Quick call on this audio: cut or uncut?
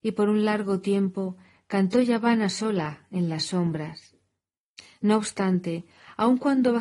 uncut